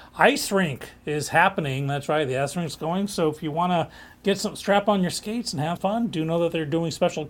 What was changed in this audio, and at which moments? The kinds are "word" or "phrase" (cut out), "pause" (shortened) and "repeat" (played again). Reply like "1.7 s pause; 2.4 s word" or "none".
5.8 s word